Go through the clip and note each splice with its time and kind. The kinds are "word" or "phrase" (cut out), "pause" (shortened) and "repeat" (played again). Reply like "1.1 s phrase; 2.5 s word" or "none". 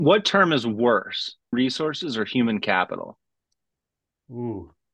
1.5 s word